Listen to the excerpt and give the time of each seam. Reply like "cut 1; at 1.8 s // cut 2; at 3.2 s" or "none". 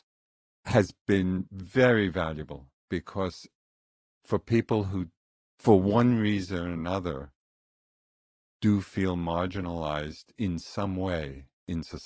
none